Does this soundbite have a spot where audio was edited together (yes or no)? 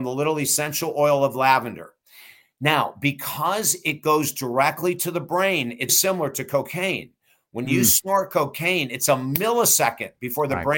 yes